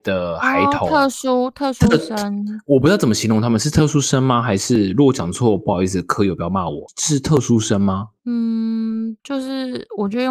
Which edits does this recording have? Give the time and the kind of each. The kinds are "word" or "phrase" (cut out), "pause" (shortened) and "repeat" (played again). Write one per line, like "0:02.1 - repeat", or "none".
0:09.2 - pause